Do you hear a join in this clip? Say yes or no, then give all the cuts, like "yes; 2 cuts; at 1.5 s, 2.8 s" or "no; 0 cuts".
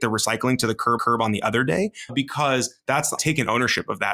yes; 3 cuts; at 1.0 s, 2.1 s, 3.2 s